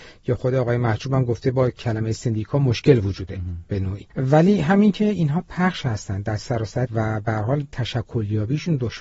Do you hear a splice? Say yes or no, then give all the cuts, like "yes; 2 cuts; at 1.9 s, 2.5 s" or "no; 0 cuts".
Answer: yes; 3 cuts; at 3.3 s, 4.1 s, 6.9 s